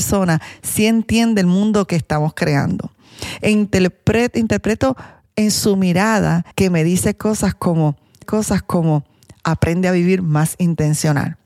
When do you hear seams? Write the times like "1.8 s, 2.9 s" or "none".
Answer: 6.5 s, 8.2 s